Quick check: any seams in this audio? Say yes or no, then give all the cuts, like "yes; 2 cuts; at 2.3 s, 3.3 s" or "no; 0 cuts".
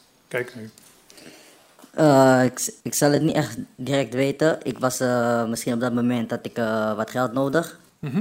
yes; 1 cut; at 2.8 s